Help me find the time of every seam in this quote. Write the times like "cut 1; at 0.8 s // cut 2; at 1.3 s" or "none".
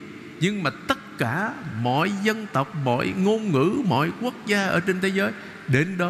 none